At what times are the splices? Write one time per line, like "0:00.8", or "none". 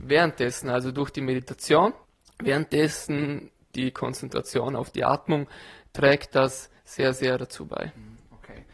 0:02.0
0:06.8